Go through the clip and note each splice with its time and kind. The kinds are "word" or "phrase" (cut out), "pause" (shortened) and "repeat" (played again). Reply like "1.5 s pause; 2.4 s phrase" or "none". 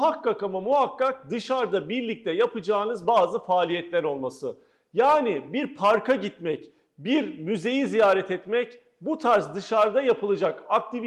none

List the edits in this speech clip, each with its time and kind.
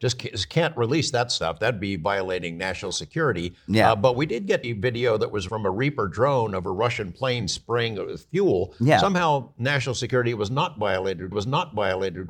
4.6 s phrase; 5.5 s word; 11.3 s repeat

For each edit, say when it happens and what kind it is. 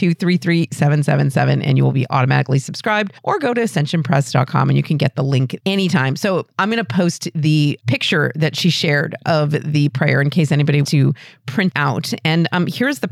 3.2 s pause; 5.6 s word; 7.8 s word; 10.8 s word; 11.7 s word

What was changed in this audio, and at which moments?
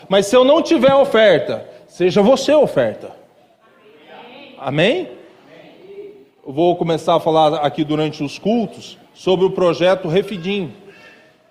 none

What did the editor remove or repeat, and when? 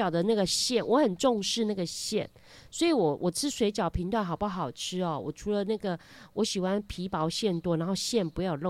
none

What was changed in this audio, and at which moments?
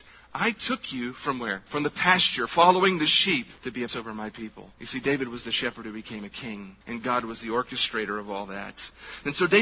1.7 s pause; 2.5 s word; 3.6 s pause; 3.9 s word; 4.7 s pause; 6.8 s pause

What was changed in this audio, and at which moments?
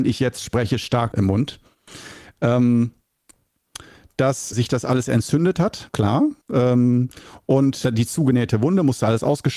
1.1 s word; 4.5 s word; 5.9 s word; 6.4 s pause; 7.8 s word

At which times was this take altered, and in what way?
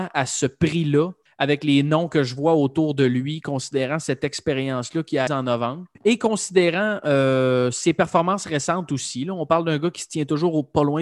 1.3 s pause; 5.3 s word; 5.9 s pause

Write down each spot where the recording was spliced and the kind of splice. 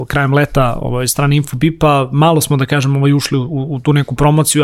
none

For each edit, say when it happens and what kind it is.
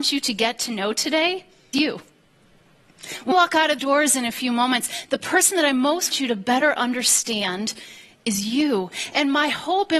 1.7 s word; 3.3 s word; 3.8 s word; 6.1 s word

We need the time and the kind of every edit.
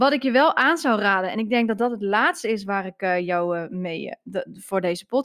none

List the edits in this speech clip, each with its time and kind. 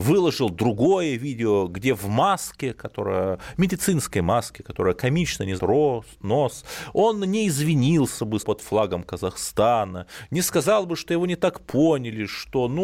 5.6 s word; 8.4 s word

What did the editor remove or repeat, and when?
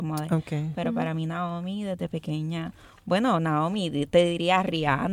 none

